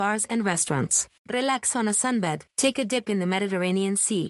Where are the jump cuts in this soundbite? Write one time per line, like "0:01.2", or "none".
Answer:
0:01.2
0:02.5